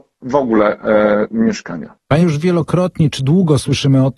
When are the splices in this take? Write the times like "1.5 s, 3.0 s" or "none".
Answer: 2.2 s